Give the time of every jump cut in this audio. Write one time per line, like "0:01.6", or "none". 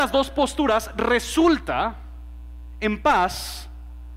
none